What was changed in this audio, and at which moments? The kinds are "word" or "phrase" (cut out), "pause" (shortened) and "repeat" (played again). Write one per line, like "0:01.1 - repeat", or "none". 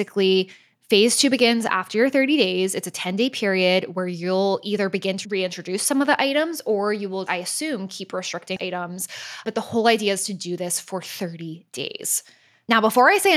0:07.3 - word
0:08.6 - word